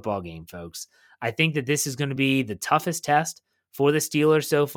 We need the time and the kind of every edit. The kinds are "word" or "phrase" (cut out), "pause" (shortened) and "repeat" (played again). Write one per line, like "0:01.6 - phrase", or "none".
none